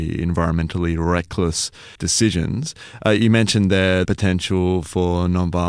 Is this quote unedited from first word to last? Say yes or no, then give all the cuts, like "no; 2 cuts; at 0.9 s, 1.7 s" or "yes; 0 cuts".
no; 2 cuts; at 2.0 s, 4.0 s